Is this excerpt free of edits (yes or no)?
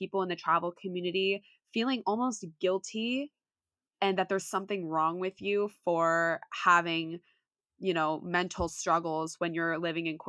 yes